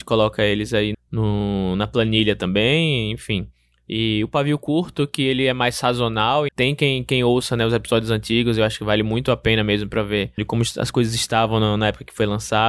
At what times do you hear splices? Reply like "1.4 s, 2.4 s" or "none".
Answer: 0.9 s, 6.5 s, 10.4 s